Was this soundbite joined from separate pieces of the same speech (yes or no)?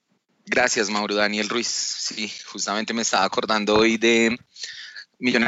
no